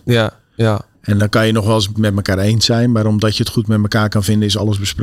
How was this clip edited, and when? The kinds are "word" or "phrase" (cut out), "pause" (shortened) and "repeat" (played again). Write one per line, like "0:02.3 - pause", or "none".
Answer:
0:00.9 - pause
0:01.9 - phrase